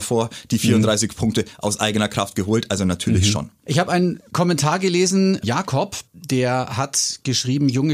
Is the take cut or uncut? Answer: cut